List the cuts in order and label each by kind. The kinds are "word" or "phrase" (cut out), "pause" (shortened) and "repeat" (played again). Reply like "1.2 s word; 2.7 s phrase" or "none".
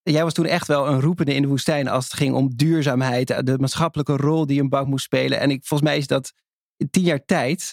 none